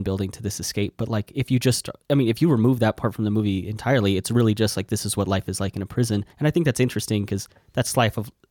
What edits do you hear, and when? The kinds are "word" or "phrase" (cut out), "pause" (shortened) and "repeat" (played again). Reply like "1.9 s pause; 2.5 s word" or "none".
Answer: 2.0 s pause; 6.3 s pause

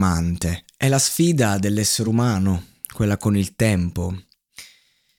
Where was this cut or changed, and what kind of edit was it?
none

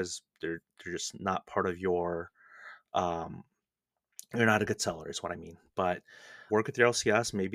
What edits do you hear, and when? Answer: 6.5 s word

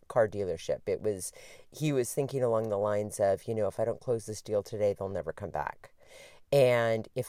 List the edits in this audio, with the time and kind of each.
none

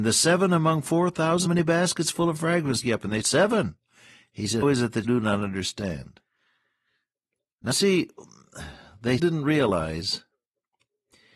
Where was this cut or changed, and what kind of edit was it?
1.5 s word; 2.8 s word; 3.2 s word; 4.6 s word; 5.0 s word; 7.7 s word; 9.2 s word

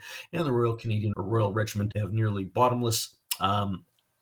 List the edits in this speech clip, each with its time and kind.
1.1 s word; 1.9 s phrase

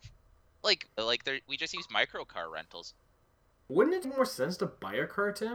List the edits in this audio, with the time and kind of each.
1.0 s word; 4.0 s phrase

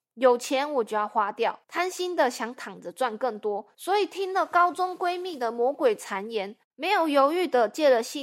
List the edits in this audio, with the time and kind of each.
1.6 s pause; 3.7 s pause; 6.6 s pause

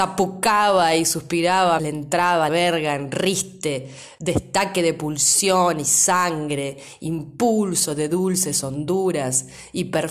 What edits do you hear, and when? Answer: 1.8 s word; 2.5 s word

